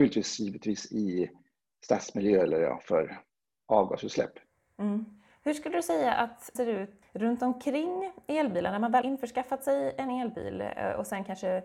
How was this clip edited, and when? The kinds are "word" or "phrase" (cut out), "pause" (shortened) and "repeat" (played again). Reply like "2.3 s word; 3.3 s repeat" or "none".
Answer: 6.6 s word; 7.0 s word; 9.0 s word